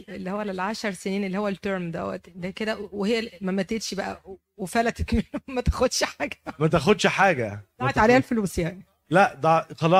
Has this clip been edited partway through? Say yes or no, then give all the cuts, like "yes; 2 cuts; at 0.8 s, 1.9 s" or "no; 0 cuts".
no; 0 cuts